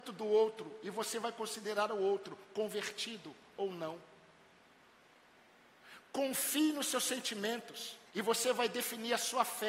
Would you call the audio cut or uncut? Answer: cut